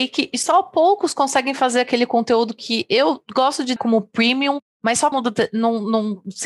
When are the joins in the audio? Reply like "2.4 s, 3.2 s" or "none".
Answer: 3.8 s, 5.1 s